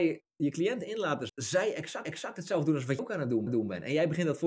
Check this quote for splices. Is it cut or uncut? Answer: cut